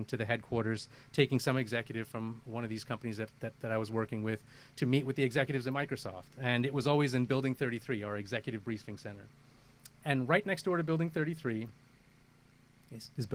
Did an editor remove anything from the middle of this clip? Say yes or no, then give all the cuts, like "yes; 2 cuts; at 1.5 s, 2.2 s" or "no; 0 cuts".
no; 0 cuts